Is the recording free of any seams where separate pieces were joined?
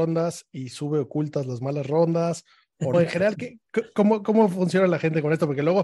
no; 2 cuts; at 2.9 s, 3.3 s

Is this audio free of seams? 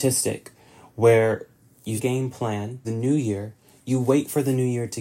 no; 2 cuts; at 2.0 s, 2.8 s

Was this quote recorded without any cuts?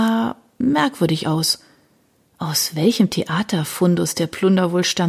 yes; 0 cuts

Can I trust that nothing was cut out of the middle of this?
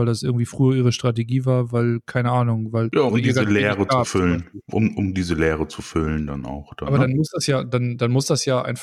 no; 1 cut; at 3.1 s

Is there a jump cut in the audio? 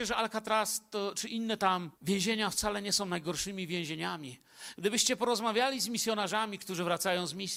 yes; 1 cut; at 1.9 s

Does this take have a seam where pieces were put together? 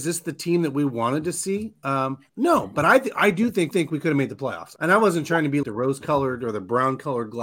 yes; 4 cuts; at 2.3 s, 3.7 s, 4.8 s, 5.6 s

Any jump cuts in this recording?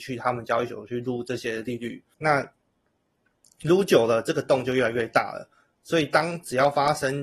yes; 1 cut; at 2.1 s

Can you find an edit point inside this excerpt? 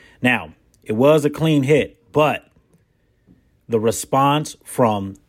no; 0 cuts

